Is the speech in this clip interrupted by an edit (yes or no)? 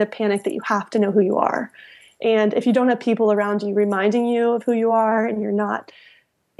no